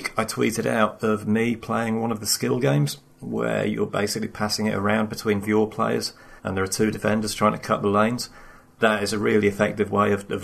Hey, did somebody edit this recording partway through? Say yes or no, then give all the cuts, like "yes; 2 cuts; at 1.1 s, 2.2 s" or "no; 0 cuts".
yes; 3 cuts; at 1.0 s, 5.4 s, 6.4 s